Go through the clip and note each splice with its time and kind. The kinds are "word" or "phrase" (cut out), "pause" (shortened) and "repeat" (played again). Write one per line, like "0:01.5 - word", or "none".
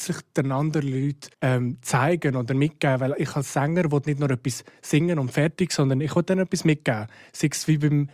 0:01.3 - pause